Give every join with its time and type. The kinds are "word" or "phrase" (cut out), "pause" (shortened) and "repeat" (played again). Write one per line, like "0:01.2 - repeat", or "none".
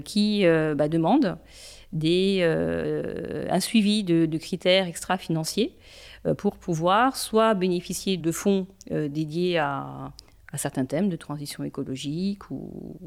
0:08.2 - word